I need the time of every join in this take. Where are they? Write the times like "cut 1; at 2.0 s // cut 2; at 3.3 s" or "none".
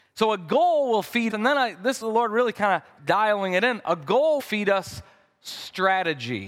cut 1; at 1.3 s // cut 2; at 2.0 s // cut 3; at 3.0 s // cut 4; at 4.4 s